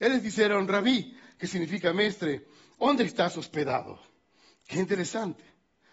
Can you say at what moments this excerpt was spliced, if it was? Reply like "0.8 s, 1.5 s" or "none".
none